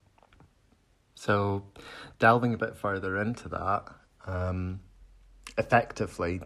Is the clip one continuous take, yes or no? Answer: yes